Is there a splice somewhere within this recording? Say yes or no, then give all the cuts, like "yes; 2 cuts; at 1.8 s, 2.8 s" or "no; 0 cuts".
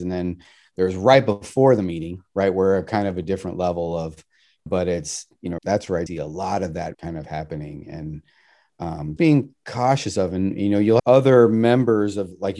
yes; 6 cuts; at 4.7 s, 5.6 s, 6.1 s, 6.9 s, 9.2 s, 11.0 s